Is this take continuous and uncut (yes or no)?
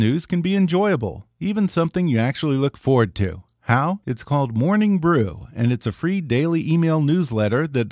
no